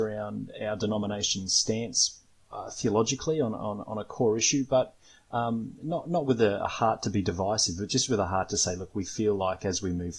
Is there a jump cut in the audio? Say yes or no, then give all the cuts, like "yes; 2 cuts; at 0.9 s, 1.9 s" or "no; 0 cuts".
no; 0 cuts